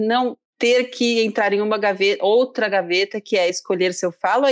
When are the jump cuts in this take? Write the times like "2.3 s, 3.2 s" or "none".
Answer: none